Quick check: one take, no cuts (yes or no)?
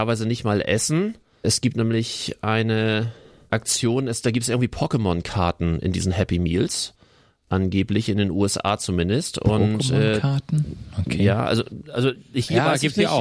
yes